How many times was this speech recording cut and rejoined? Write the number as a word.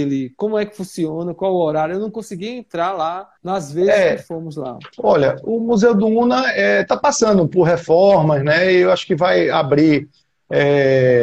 two